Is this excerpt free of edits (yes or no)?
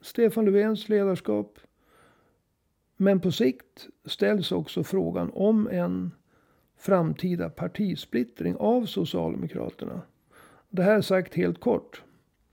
yes